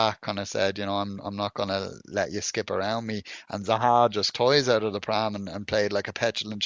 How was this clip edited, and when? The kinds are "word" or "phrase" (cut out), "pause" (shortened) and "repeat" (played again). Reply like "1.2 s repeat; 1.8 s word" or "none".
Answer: 4.3 s phrase